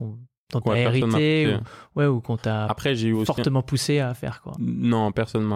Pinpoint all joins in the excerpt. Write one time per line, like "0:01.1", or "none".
none